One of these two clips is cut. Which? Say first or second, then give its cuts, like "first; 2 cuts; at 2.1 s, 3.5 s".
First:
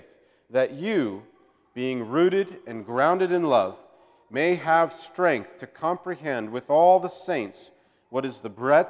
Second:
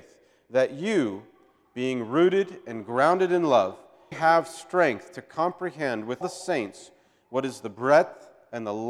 second; 2 cuts; at 4.1 s, 6.2 s